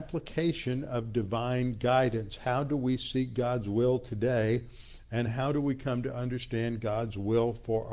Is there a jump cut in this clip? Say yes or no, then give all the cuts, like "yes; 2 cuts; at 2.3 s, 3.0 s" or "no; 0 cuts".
no; 0 cuts